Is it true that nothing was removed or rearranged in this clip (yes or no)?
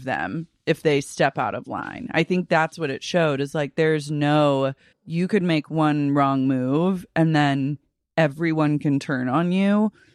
no